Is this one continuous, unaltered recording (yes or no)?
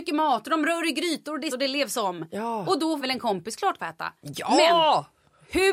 no